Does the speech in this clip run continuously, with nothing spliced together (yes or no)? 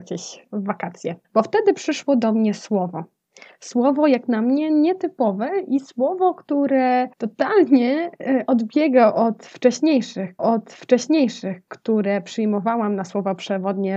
no